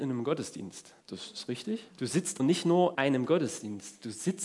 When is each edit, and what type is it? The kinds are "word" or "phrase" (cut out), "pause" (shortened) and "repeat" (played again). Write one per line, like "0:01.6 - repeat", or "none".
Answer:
0:01.0 - pause
0:01.9 - pause
0:02.4 - word
0:02.9 - word